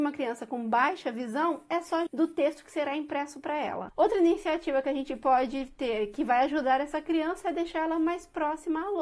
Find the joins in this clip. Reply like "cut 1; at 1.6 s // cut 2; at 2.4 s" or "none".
cut 1; at 2.1 s